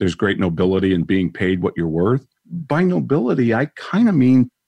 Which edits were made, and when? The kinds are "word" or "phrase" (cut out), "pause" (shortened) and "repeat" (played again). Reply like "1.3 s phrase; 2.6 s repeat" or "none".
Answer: 2.4 s pause